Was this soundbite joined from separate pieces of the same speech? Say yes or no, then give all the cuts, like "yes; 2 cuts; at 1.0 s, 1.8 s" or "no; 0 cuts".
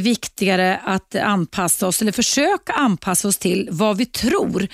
no; 0 cuts